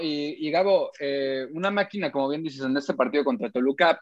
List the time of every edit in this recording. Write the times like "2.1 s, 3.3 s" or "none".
none